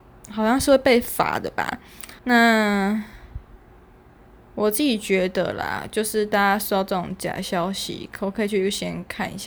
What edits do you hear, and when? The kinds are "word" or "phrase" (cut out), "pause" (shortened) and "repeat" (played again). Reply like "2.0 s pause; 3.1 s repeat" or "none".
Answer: 2.2 s pause